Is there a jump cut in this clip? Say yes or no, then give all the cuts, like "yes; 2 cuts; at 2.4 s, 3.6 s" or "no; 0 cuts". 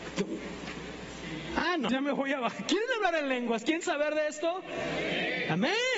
yes; 1 cut; at 1.9 s